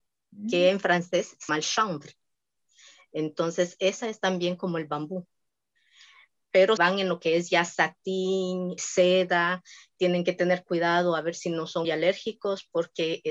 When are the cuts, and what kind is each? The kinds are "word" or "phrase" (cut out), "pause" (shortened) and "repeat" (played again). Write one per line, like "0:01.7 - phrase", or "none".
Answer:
0:01.5 - word
0:06.8 - word
0:08.8 - word
0:11.8 - word